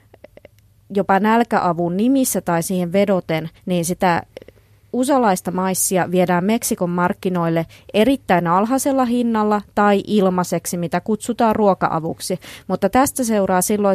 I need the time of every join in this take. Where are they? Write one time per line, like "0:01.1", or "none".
0:03.6

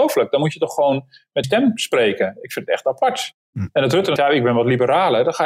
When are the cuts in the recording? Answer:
0:01.4
0:04.2

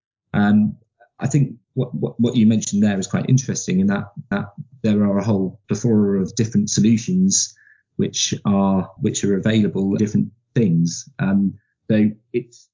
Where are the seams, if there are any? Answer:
0:01.6
0:04.3
0:05.6
0:09.0
0:10.0

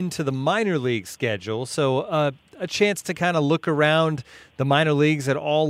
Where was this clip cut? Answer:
none

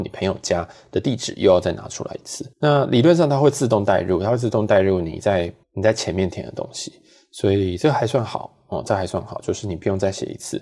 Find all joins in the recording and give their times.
0:02.5
0:05.6

